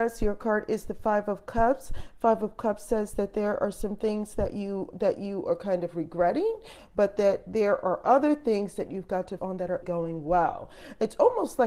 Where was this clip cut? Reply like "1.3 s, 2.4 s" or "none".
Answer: 4.9 s, 9.4 s, 9.8 s